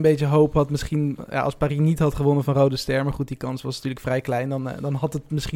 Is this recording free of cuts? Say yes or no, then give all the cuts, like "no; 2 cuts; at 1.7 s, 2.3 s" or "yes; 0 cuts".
yes; 0 cuts